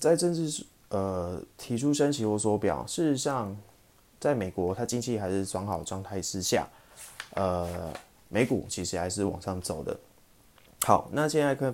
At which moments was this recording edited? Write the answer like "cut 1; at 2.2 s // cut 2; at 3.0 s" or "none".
none